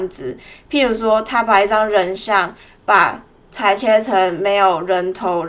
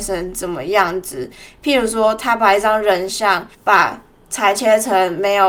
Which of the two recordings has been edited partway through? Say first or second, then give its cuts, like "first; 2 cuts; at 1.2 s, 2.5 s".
second; 1 cut; at 3.5 s